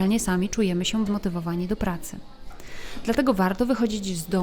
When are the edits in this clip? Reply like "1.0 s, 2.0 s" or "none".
1.1 s

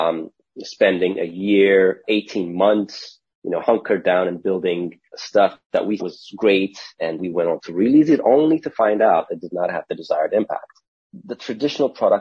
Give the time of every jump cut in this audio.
2.0 s, 5.1 s, 6.0 s, 7.2 s, 9.3 s

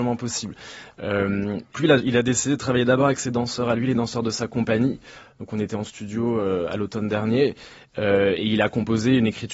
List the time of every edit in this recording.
1.7 s

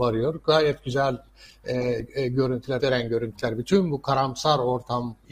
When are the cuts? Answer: 2.8 s

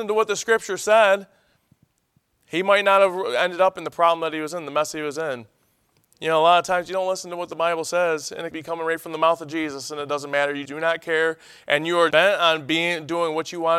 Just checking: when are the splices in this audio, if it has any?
8.5 s, 10.6 s, 12.1 s

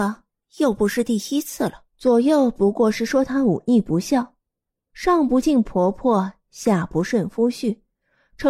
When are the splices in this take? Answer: 1.9 s

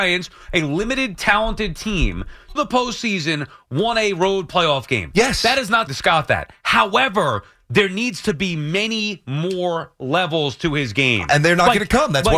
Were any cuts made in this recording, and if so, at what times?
2.6 s, 5.9 s

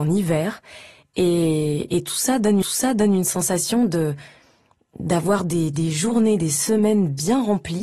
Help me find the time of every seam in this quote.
2.6 s

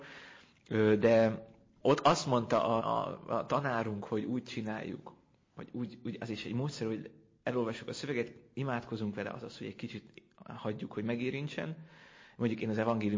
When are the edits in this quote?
2.8 s

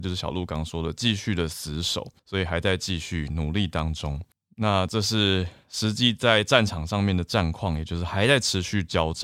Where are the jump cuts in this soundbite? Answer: 2.2 s, 4.3 s

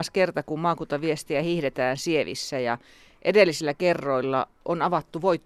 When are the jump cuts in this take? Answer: none

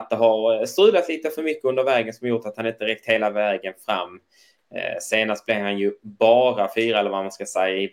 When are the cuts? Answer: none

